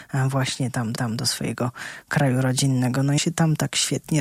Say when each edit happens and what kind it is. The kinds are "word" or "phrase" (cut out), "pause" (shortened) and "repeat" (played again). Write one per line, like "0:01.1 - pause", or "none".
0:01.0 - repeat
0:03.2 - word